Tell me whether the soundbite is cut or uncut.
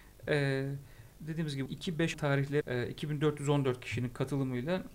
cut